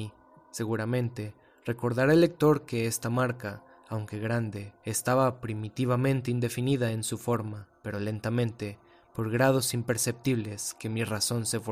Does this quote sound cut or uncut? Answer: uncut